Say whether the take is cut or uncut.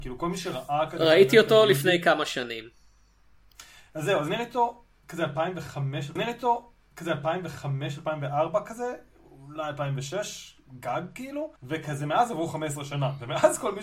cut